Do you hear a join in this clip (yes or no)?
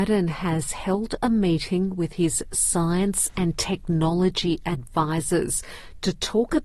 no